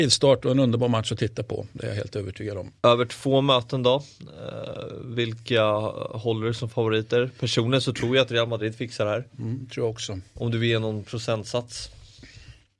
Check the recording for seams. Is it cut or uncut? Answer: uncut